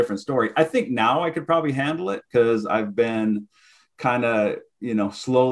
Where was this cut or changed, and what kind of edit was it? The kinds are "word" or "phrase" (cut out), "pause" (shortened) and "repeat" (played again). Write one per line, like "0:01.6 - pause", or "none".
none